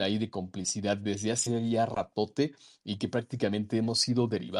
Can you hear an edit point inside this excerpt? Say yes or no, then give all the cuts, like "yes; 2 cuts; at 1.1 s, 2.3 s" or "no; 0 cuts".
no; 0 cuts